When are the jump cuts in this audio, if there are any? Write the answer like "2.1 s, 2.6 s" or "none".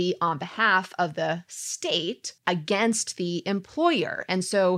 2.4 s